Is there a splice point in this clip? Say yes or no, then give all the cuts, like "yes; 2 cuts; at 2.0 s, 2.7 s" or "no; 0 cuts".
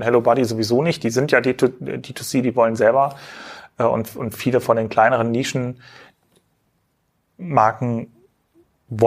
no; 0 cuts